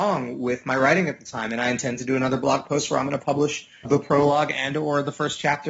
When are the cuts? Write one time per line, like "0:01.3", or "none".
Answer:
0:03.8